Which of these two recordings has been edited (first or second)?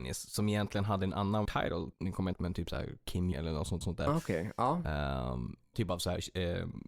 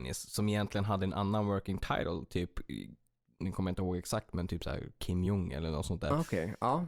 first